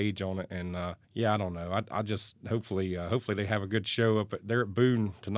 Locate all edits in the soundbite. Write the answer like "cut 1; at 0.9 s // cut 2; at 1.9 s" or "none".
cut 1; at 1.0 s